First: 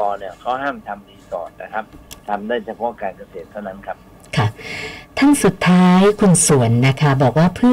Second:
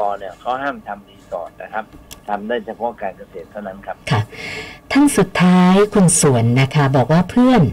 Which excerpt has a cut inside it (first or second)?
second